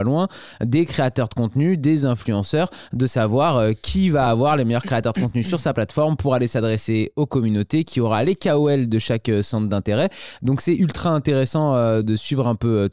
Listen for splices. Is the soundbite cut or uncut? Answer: uncut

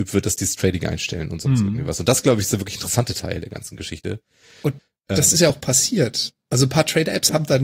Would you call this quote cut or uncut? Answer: uncut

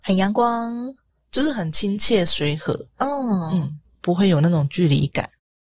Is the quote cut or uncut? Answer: uncut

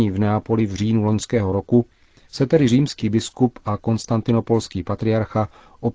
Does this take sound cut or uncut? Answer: uncut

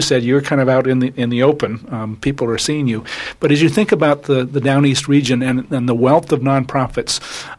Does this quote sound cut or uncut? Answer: uncut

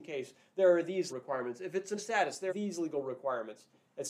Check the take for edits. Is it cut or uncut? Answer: cut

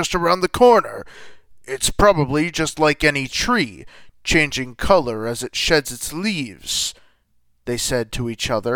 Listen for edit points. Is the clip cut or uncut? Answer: uncut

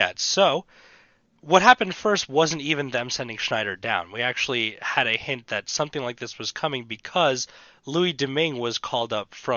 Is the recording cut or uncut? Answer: uncut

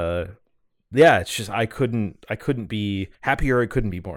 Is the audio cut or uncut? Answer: cut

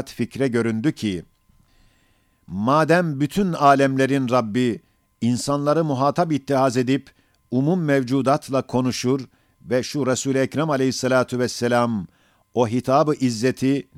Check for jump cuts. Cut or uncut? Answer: uncut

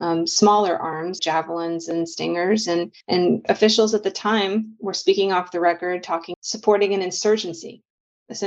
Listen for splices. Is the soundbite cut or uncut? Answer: cut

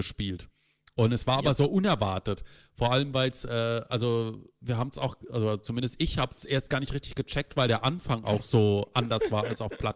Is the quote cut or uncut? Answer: uncut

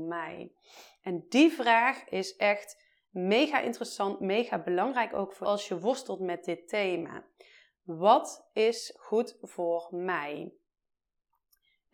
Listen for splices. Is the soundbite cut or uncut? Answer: cut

